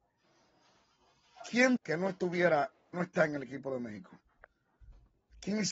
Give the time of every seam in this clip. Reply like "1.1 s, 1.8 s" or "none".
1.8 s, 2.9 s

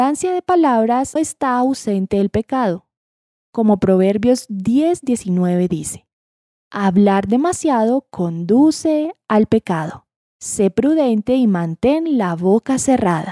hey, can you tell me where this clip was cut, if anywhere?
1.2 s

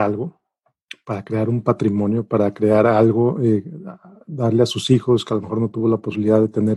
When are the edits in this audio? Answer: none

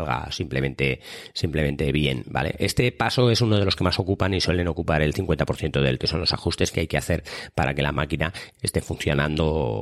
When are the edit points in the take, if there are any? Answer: 6.0 s, 6.7 s, 8.5 s

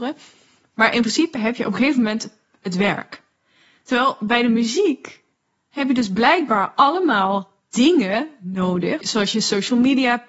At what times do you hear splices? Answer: none

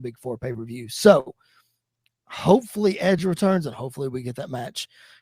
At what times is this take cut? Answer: none

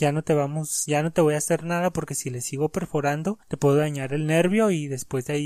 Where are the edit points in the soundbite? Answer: 3.4 s

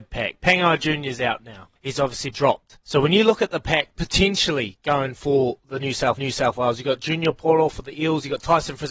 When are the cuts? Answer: 1.8 s, 2.3 s, 2.8 s, 6.2 s

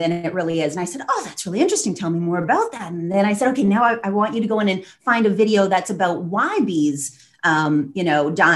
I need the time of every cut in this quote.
none

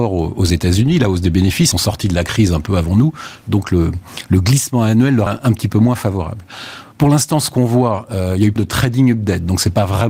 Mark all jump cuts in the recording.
1.7 s, 5.3 s, 6.9 s, 8.6 s

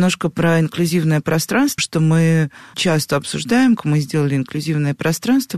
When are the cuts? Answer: 1.8 s, 2.7 s, 3.8 s

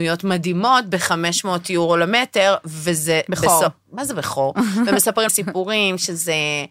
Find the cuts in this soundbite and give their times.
5.3 s

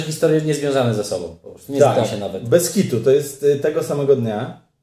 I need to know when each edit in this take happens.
none

